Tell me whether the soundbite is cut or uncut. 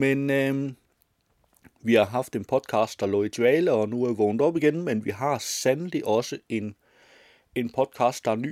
uncut